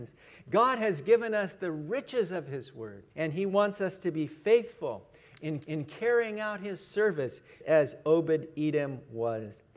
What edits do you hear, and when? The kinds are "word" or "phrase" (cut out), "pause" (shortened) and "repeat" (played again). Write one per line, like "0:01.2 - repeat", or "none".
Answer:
0:03.1 - pause
0:05.6 - repeat
0:07.6 - word